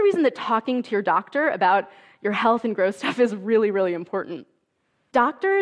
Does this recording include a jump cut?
no; 0 cuts

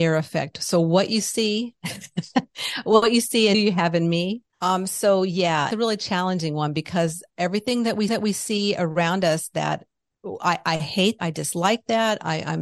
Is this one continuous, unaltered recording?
no; 5 cuts; at 3.5 s, 4.5 s, 5.7 s, 8.1 s, 11.2 s

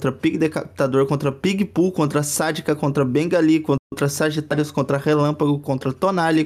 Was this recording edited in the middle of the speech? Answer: no; 0 cuts

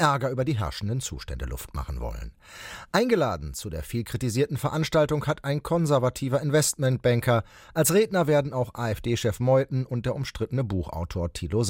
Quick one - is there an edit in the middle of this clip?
no; 0 cuts

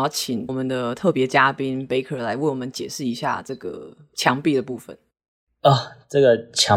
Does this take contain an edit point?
no; 0 cuts

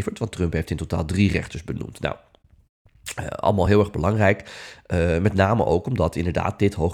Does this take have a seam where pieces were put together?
no; 0 cuts

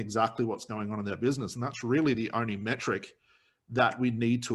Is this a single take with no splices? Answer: yes; 0 cuts

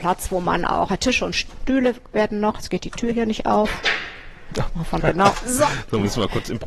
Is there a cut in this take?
yes; 1 cut; at 5.0 s

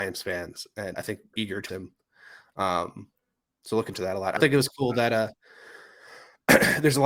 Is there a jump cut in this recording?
yes; 5 cuts; at 0.9 s, 1.3 s, 1.7 s, 3.9 s, 4.4 s

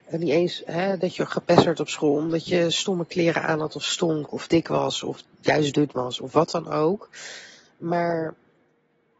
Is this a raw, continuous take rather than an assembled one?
yes; 0 cuts

